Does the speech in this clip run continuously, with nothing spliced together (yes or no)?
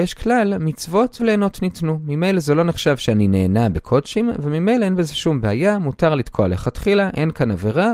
no